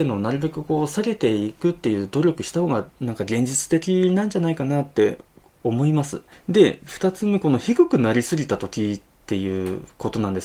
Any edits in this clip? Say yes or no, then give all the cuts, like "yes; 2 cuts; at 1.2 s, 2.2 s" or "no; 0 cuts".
yes; 2 cuts; at 2.9 s, 9.2 s